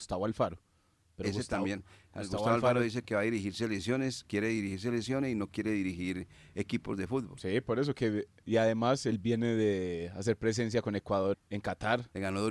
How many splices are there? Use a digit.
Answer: 1